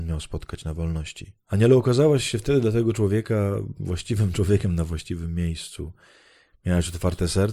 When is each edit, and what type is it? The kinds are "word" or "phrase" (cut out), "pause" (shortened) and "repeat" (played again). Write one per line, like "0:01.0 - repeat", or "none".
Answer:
0:01.4 - pause